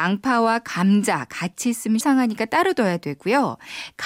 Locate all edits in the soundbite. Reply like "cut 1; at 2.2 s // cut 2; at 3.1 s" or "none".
cut 1; at 2.0 s

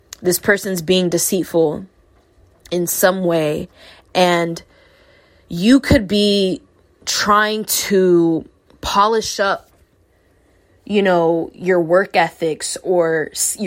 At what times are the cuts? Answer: cut 1; at 8.7 s

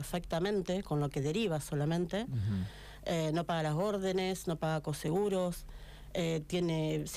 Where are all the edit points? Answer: none

